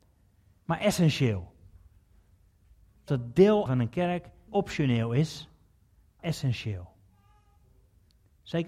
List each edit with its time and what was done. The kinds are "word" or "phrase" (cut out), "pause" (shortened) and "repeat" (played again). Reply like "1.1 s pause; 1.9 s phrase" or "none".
3.1 s word; 3.7 s word; 4.5 s word; 6.2 s word